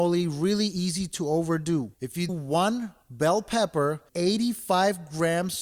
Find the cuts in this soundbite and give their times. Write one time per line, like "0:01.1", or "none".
0:01.9
0:02.3
0:03.0
0:04.1